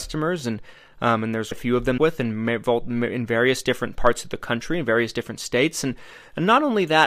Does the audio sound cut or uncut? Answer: cut